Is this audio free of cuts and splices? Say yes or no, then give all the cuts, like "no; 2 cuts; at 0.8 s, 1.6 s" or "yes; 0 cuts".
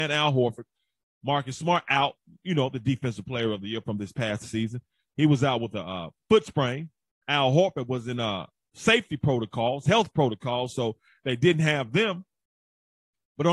yes; 0 cuts